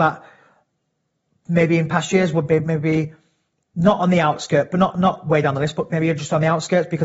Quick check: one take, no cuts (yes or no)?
yes